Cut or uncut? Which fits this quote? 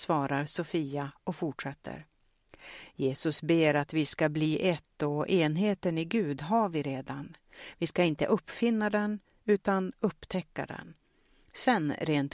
uncut